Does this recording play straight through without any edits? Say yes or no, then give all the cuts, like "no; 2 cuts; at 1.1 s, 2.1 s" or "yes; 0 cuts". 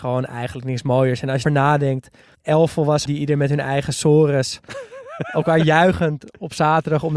no; 3 cuts; at 1.4 s, 2.3 s, 3.1 s